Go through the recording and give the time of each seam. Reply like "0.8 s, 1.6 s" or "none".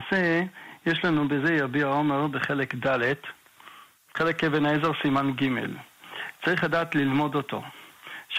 4.0 s